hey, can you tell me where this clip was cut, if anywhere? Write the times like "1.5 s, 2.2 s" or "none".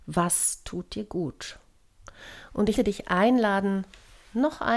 2.7 s